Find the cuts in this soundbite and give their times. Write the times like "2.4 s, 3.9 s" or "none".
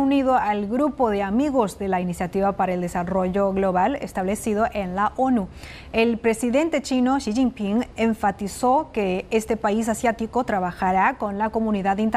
none

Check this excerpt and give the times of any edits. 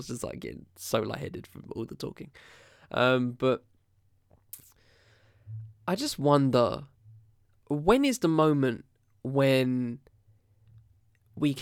none

